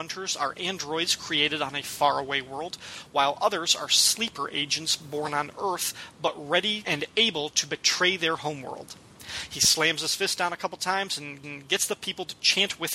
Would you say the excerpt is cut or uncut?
cut